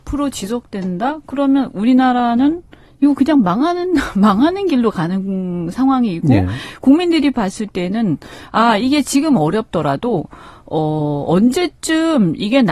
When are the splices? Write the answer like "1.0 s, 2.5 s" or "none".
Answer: none